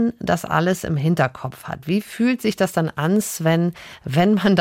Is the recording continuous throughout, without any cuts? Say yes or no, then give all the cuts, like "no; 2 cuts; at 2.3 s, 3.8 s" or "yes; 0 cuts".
yes; 0 cuts